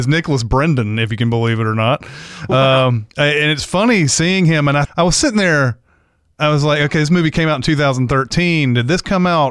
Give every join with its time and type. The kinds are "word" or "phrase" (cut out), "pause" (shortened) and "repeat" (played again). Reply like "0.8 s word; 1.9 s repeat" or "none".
3.1 s pause; 4.8 s word